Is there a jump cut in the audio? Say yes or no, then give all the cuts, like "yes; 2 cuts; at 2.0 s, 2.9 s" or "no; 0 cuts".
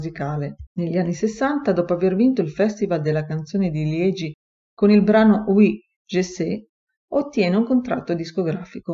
no; 0 cuts